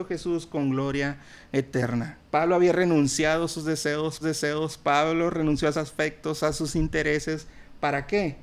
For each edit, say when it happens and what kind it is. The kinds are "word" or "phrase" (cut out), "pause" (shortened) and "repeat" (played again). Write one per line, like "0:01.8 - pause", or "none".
0:02.3 - pause
0:04.2 - repeat
0:05.7 - word